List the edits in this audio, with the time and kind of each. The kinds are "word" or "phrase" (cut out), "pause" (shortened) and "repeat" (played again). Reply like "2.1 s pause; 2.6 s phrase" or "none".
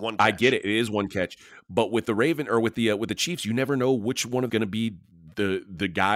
4.5 s phrase